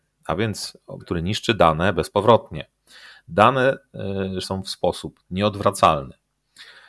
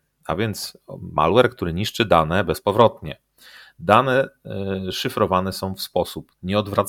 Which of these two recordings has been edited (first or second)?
first